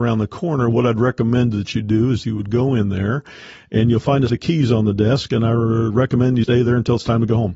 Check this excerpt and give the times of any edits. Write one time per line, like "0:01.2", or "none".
0:02.2
0:04.3
0:06.4